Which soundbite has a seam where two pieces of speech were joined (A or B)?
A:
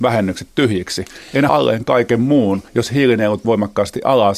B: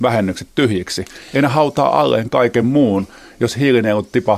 A